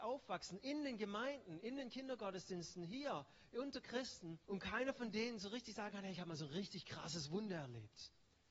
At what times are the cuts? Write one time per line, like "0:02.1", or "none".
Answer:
0:04.4